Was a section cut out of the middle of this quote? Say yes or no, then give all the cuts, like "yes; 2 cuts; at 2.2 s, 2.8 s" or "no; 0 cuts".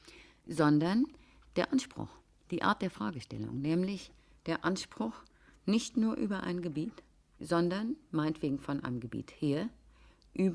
no; 0 cuts